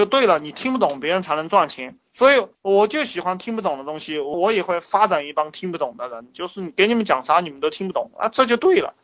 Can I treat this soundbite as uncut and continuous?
yes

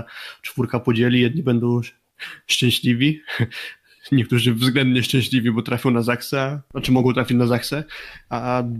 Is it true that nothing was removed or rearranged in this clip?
yes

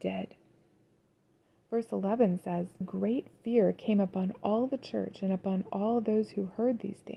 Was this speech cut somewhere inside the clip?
yes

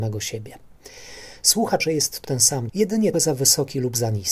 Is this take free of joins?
no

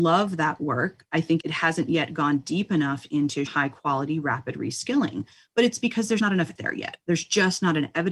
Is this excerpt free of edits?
no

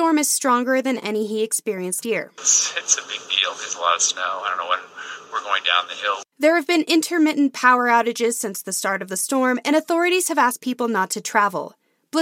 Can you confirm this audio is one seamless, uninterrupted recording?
no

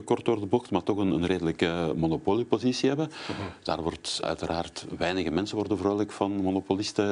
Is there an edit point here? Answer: yes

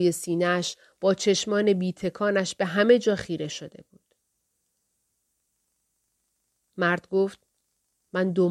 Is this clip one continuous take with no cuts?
yes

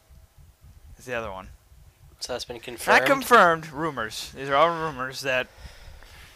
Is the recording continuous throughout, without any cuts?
yes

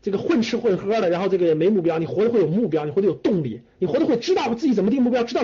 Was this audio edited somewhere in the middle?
yes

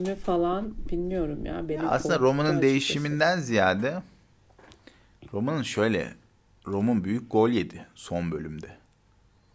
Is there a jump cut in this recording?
no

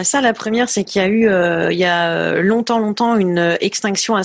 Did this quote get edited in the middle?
no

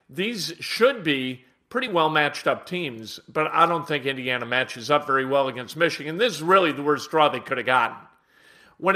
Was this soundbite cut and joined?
no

